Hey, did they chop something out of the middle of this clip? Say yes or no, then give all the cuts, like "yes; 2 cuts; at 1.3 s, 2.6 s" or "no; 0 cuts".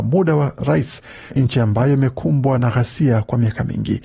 yes; 1 cut; at 1.3 s